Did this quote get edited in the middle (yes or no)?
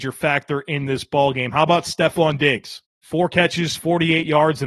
yes